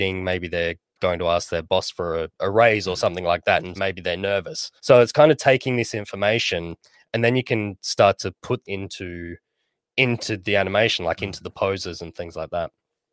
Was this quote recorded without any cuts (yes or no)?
no